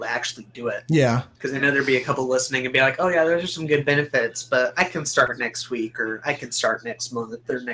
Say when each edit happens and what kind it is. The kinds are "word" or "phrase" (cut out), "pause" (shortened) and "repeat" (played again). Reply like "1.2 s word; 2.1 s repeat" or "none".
1.3 s pause